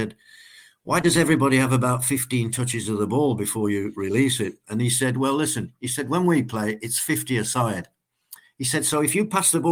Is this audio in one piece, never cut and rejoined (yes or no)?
yes